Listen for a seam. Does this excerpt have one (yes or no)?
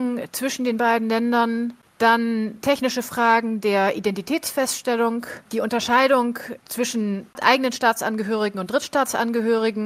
yes